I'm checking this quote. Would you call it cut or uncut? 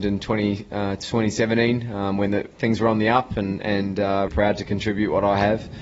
cut